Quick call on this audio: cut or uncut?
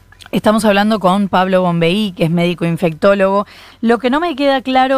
uncut